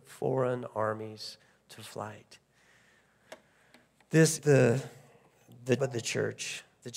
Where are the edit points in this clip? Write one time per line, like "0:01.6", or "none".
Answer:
0:04.4
0:05.8